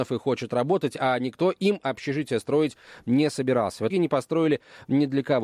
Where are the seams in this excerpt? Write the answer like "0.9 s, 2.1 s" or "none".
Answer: 3.9 s